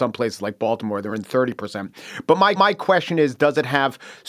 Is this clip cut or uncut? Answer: cut